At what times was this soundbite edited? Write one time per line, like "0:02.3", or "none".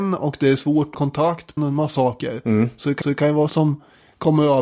0:00.9
0:01.6
0:01.9
0:03.0
0:03.5